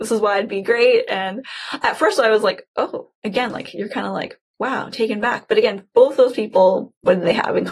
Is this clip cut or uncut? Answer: uncut